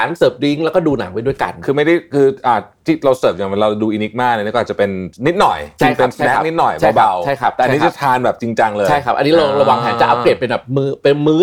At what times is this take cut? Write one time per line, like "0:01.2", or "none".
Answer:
0:05.2